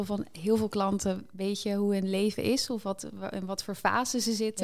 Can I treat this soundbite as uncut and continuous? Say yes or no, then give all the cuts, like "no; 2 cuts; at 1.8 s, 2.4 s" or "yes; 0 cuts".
yes; 0 cuts